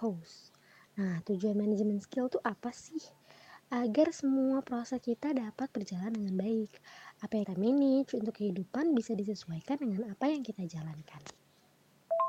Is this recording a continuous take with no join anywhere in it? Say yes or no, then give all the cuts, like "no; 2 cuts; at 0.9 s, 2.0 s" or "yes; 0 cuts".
no; 1 cut; at 7.4 s